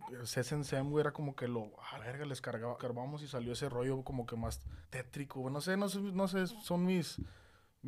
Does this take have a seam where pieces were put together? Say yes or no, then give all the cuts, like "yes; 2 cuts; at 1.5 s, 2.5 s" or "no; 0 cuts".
yes; 4 cuts; at 2.0 s, 2.8 s, 3.7 s, 4.8 s